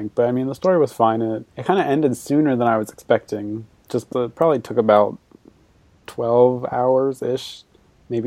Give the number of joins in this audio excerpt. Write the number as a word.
two